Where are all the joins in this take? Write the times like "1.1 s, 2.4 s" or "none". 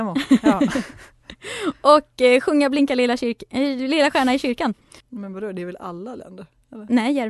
5.0 s